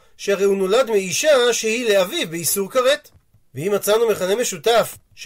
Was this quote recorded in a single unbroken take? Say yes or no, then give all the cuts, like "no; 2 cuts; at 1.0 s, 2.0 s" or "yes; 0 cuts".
yes; 0 cuts